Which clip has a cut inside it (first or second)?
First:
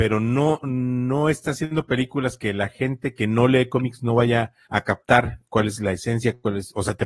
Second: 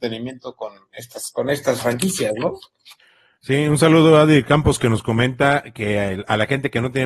first